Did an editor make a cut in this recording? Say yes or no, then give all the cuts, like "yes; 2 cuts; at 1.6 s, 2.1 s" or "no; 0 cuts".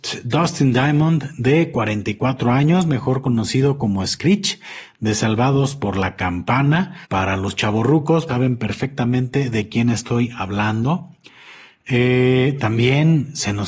yes; 2 cuts; at 7.0 s, 8.3 s